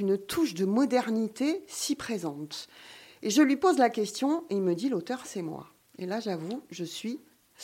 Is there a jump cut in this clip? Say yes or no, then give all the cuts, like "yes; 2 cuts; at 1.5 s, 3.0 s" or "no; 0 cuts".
no; 0 cuts